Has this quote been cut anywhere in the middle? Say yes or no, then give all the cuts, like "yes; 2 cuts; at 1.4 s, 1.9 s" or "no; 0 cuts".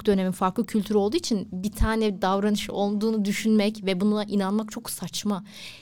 no; 0 cuts